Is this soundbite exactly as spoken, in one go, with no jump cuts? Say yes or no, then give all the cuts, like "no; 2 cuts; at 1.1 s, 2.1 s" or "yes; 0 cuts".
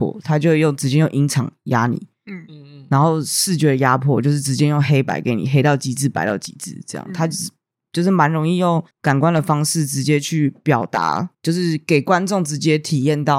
no; 2 cuts; at 8.9 s, 11.3 s